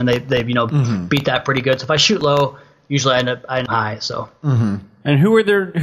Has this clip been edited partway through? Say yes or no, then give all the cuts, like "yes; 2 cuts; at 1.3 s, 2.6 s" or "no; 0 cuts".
yes; 1 cut; at 3.7 s